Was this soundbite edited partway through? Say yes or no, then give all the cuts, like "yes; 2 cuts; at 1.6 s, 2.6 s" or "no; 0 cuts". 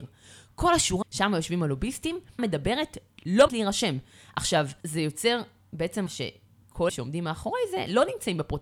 yes; 6 cuts; at 1.0 s, 2.4 s, 3.5 s, 4.8 s, 6.1 s, 6.9 s